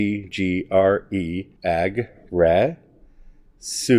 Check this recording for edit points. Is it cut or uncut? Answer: cut